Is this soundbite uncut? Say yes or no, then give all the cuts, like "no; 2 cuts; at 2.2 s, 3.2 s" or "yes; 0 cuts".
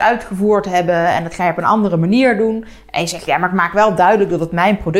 yes; 0 cuts